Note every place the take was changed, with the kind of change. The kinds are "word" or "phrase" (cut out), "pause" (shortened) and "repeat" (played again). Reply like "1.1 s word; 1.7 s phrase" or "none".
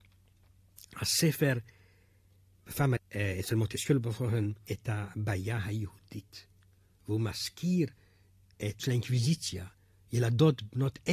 3.0 s word; 4.7 s word; 8.8 s word